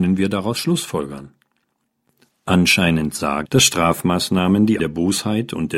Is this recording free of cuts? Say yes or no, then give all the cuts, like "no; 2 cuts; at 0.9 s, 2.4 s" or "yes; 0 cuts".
no; 2 cuts; at 3.4 s, 4.8 s